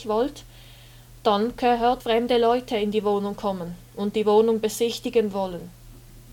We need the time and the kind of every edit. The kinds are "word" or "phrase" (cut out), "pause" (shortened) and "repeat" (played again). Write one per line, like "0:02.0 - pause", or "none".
0:02.0 - phrase

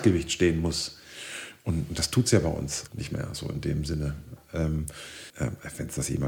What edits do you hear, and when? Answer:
0:02.9 - word
0:05.3 - pause

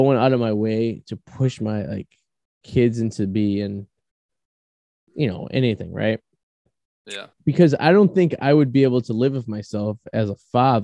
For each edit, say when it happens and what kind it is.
0:07.3 - pause

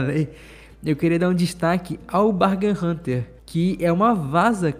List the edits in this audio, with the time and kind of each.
0:03.4 - pause

